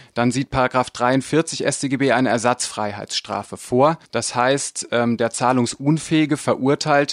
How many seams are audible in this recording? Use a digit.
1